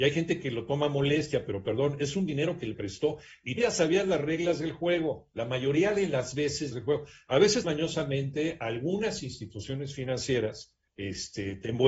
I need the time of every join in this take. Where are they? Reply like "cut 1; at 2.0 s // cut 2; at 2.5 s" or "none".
cut 1; at 2.7 s // cut 2; at 3.6 s // cut 3; at 6.7 s // cut 4; at 7.6 s